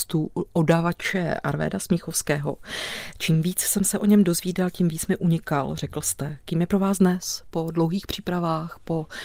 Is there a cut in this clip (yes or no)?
no